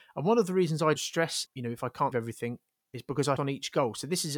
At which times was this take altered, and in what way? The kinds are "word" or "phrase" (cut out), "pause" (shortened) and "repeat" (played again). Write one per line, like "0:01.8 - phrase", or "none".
0:01.0 - word
0:01.5 - word
0:02.1 - word
0:03.4 - word